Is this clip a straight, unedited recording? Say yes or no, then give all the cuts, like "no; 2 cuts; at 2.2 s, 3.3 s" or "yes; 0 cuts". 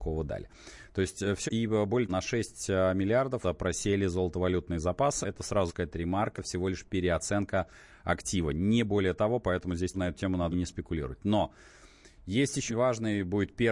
no; 9 cuts; at 1.5 s, 2.1 s, 3.4 s, 5.2 s, 5.7 s, 6.4 s, 9.9 s, 10.5 s, 12.7 s